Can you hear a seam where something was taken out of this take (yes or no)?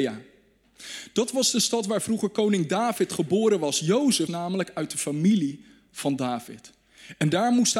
yes